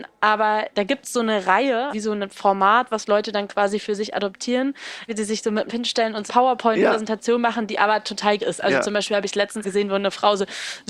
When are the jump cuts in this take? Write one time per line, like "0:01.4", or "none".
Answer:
0:01.9
0:05.1
0:05.7
0:06.3
0:08.4
0:09.6